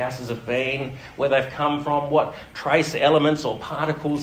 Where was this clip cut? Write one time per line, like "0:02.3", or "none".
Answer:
none